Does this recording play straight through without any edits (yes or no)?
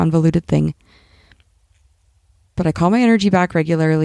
yes